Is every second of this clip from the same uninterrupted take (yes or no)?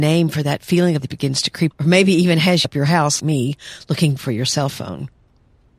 no